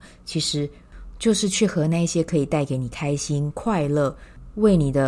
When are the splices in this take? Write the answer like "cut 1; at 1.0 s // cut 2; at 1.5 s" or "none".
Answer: none